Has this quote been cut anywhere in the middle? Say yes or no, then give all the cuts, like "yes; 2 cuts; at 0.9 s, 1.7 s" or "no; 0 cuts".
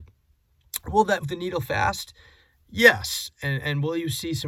yes; 1 cut; at 1.2 s